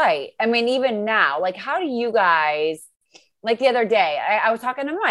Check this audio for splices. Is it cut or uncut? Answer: uncut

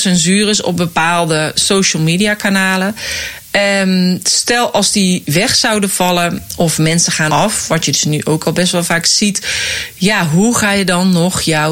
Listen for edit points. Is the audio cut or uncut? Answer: cut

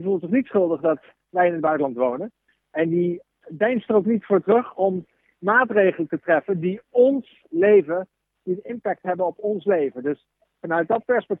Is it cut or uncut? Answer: uncut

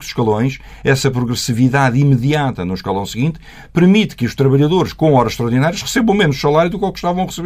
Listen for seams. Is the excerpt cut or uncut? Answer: uncut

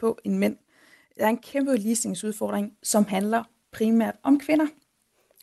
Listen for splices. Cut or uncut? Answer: uncut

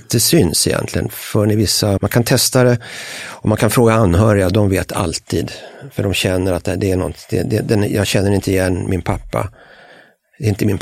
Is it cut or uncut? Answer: cut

